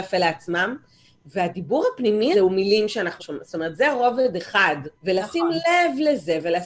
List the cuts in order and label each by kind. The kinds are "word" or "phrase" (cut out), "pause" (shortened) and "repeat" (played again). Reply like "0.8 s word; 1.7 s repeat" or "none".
2.3 s word; 3.2 s word; 4.9 s pause